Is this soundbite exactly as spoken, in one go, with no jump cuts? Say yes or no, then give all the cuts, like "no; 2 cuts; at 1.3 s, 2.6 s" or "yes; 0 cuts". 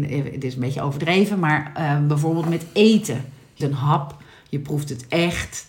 no; 1 cut; at 3.6 s